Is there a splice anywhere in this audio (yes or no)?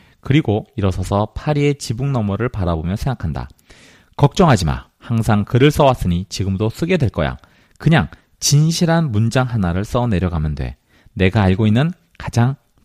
no